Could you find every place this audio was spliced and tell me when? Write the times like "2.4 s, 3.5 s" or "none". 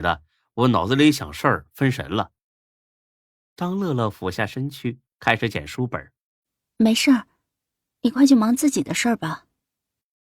none